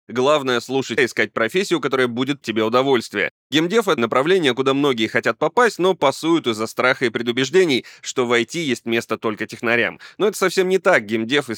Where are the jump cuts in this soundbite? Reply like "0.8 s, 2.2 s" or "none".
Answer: 1.0 s, 2.4 s, 4.0 s